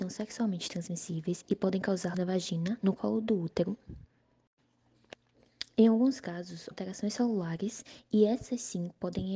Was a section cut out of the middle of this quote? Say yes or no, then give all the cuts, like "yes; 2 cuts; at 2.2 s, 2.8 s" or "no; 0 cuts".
yes; 2 cuts; at 2.1 s, 6.7 s